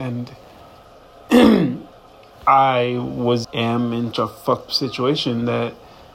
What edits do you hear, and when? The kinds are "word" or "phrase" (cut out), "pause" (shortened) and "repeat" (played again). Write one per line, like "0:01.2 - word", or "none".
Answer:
0:03.4 - word
0:04.1 - word
0:04.7 - word

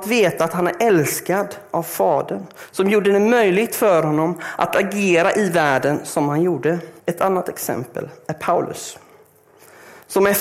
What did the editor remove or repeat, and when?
0:07.0 - pause

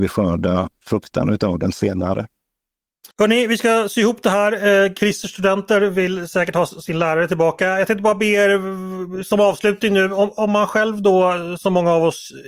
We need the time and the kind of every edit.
0:03.1 - pause

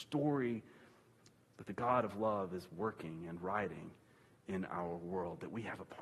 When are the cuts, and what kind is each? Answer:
none

